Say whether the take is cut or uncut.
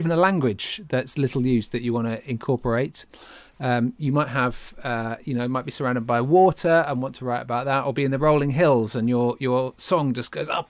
uncut